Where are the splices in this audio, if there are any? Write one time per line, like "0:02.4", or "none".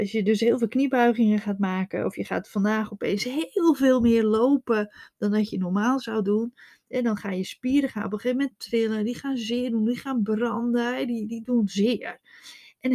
none